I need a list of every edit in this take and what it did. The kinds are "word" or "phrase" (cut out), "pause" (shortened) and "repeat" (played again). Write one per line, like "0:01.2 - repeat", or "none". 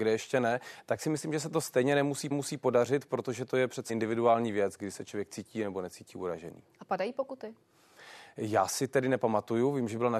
0:02.3 - repeat
0:03.9 - word